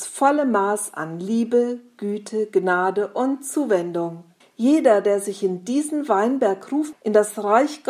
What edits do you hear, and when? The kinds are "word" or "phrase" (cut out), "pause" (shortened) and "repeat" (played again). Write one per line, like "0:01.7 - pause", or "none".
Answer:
0:04.4 - pause
0:06.9 - word